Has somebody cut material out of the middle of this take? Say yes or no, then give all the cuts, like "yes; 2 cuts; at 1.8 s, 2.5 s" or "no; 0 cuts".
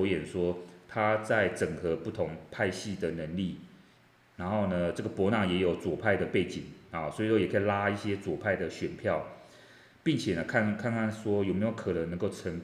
no; 0 cuts